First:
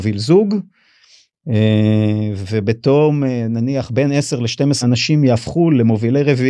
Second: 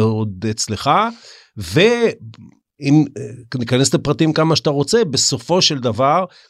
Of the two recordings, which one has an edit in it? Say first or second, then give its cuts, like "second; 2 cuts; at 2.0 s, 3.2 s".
first; 1 cut; at 4.8 s